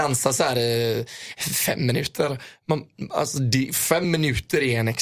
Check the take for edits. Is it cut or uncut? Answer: uncut